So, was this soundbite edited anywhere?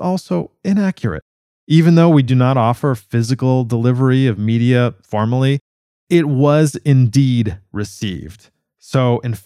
no; 0 cuts

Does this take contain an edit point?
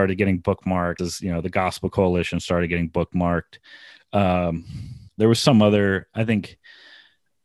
yes; 2 cuts; at 1.0 s, 5.1 s

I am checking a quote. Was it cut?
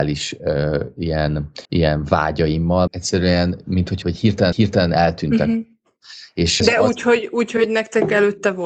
yes; 5 cuts; at 1.6 s, 2.9 s, 4.0 s, 4.5 s, 6.6 s

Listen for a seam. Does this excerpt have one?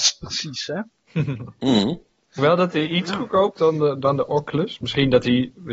yes; 2 cuts; at 2.4 s, 3.6 s

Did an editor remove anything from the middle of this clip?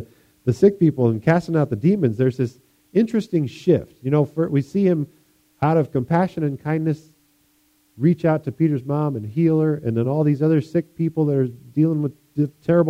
no; 0 cuts

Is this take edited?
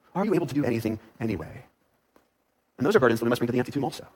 no; 0 cuts

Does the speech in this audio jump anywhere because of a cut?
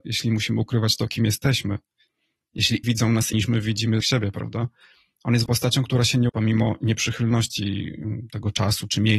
yes; 5 cuts; at 2.8 s, 3.3 s, 4.0 s, 5.5 s, 6.3 s

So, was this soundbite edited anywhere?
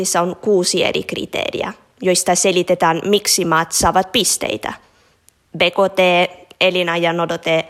no; 0 cuts

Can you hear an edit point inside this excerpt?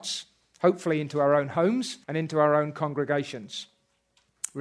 yes; 1 cut; at 2.0 s

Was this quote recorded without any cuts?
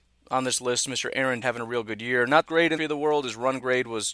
no; 3 cuts; at 1.4 s, 2.5 s, 2.8 s

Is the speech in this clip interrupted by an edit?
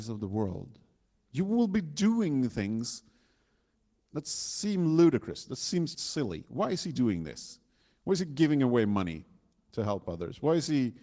yes; 1 cut; at 5.9 s

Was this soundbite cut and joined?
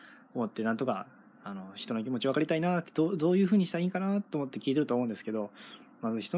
no; 0 cuts

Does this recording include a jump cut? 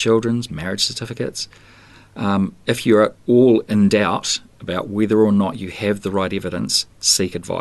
no; 0 cuts

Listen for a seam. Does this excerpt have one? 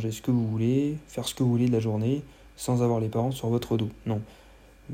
no; 0 cuts

